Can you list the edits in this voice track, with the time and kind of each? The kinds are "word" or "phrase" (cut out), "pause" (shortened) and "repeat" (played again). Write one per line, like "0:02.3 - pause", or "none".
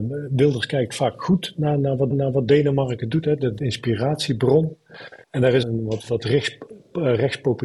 0:02.1 - repeat
0:03.6 - phrase
0:05.2 - pause
0:05.6 - phrase